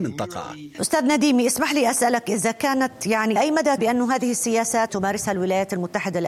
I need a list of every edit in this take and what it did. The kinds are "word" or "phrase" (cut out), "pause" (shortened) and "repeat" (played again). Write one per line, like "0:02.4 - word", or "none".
0:03.4 - word
0:03.8 - word
0:04.9 - word